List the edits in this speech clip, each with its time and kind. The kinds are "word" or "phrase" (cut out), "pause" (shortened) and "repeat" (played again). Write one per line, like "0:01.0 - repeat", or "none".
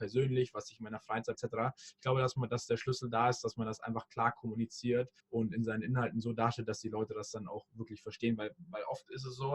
0:01.3 - word
0:05.2 - pause